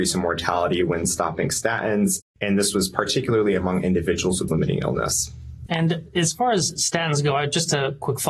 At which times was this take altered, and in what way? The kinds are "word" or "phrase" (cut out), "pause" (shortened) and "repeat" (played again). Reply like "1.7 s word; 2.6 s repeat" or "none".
4.5 s phrase